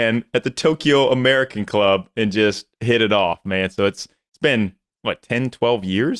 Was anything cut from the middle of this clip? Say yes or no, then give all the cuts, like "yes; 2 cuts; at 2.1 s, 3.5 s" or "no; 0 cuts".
no; 0 cuts